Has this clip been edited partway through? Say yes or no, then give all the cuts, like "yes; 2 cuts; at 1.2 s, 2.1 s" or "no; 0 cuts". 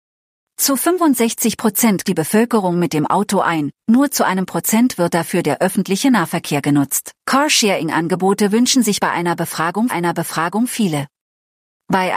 yes; 3 cuts; at 2.0 s, 7.2 s, 9.9 s